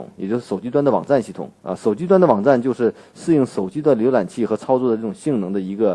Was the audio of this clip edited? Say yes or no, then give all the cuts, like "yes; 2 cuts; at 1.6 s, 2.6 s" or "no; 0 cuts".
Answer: yes; 1 cut; at 1.6 s